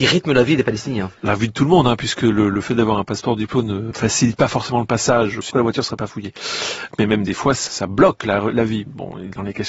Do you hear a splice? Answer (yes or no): yes